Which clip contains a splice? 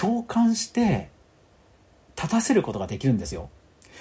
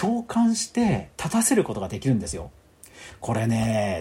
second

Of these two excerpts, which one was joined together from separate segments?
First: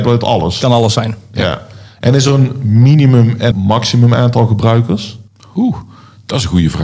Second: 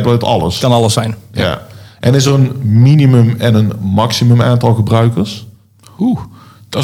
first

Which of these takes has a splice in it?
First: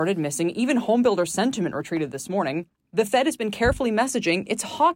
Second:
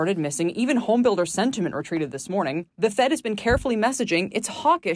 second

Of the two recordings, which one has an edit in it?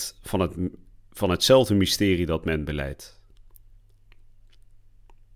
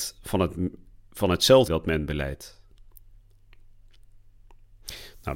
second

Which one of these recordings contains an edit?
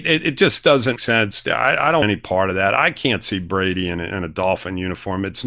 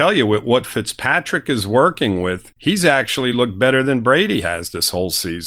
first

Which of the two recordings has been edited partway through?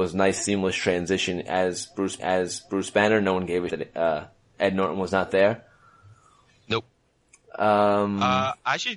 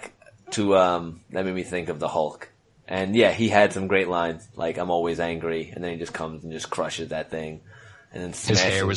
first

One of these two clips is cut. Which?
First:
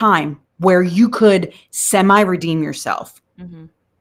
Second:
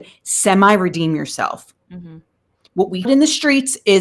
second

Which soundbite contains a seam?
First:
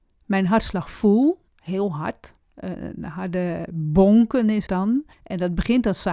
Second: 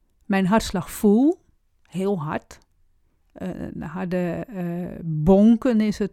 first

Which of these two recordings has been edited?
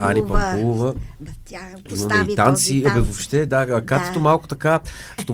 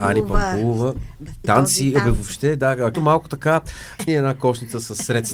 second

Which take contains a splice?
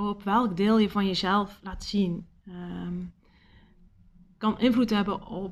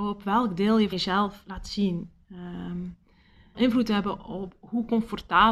second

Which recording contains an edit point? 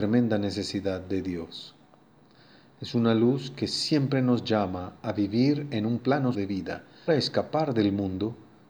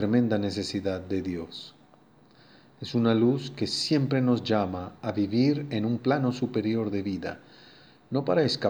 first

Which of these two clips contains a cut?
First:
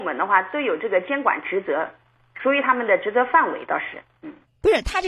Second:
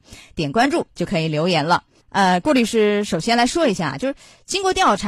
second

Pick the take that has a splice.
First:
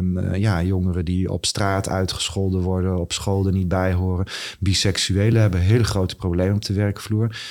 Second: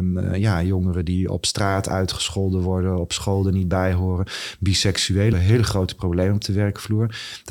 second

